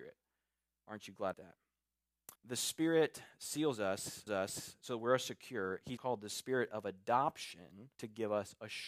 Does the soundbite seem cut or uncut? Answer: cut